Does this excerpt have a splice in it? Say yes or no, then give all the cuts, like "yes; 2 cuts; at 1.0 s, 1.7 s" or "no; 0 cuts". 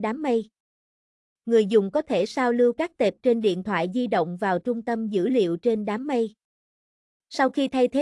no; 0 cuts